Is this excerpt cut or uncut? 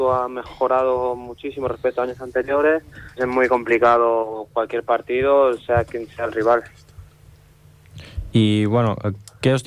cut